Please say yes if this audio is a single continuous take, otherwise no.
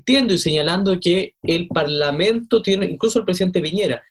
yes